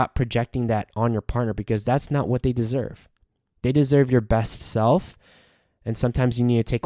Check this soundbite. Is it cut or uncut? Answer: uncut